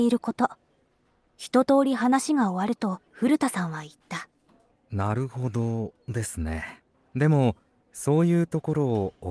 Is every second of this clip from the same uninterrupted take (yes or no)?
no